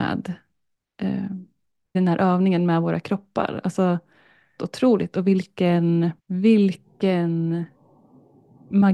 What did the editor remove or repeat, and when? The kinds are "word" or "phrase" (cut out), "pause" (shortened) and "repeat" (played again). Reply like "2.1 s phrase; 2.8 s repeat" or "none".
1.9 s phrase; 4.6 s phrase; 6.2 s pause